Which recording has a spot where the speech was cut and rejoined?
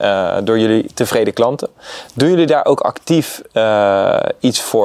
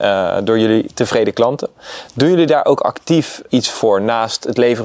second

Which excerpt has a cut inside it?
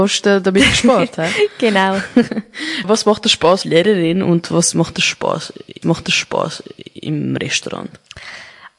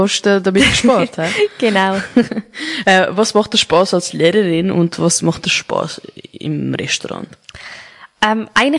first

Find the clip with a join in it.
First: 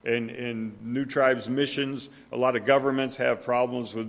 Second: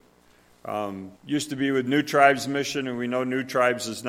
second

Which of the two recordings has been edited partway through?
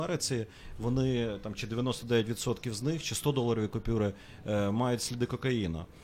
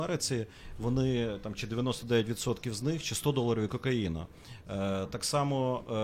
second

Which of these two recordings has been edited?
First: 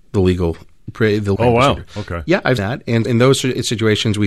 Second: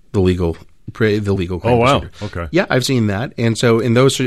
first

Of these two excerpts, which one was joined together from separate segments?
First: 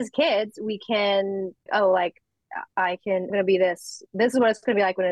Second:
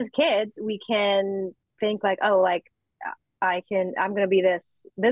first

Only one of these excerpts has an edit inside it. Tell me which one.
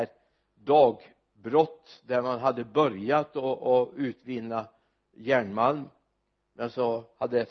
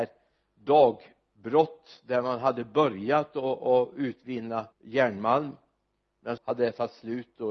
second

